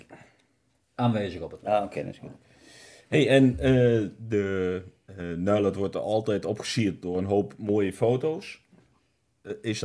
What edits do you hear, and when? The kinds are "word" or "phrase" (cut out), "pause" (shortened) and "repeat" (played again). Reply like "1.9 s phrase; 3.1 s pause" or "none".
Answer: none